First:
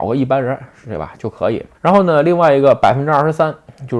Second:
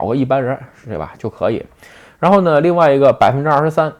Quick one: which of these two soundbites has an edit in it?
first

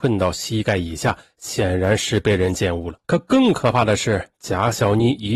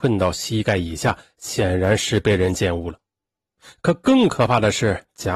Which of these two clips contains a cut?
first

